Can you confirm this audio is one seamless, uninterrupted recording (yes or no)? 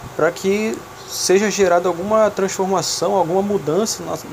yes